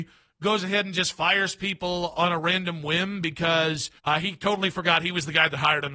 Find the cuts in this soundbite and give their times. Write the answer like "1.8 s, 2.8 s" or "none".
4.0 s